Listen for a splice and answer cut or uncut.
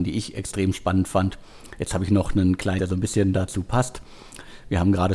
cut